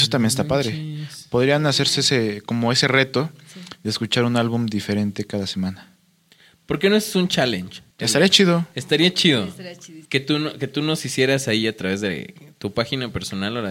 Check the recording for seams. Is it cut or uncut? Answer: cut